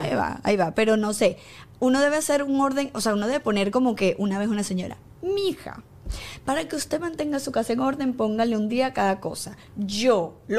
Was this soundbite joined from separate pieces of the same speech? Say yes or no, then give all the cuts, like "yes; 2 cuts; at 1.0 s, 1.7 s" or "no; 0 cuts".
no; 0 cuts